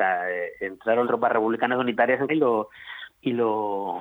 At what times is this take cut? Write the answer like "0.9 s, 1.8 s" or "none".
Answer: 1.0 s, 2.3 s, 3.1 s